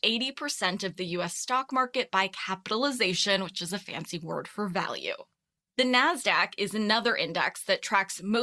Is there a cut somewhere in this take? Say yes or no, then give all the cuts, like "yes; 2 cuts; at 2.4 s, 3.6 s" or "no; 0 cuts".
no; 0 cuts